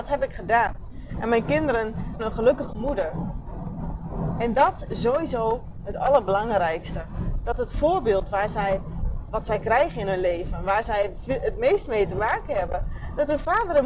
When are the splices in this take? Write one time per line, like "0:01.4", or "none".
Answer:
0:02.2
0:04.9
0:09.3